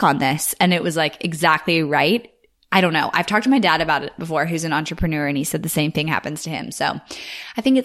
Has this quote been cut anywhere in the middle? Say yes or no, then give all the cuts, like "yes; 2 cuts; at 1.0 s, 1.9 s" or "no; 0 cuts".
no; 0 cuts